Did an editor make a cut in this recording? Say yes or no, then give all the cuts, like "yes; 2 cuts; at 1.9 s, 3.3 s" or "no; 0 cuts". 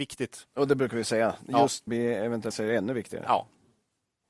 yes; 2 cuts; at 1.9 s, 2.5 s